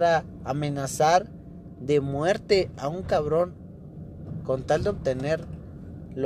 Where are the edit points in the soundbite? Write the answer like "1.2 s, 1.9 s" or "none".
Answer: none